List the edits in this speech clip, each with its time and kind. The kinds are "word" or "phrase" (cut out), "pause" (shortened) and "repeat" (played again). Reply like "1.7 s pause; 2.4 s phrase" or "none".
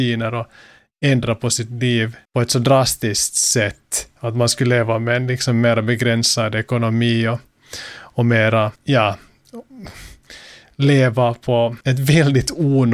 2.2 s pause; 8.7 s pause; 11.8 s pause